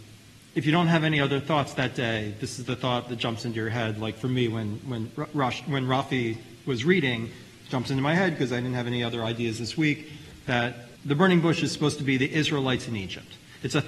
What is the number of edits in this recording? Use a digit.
1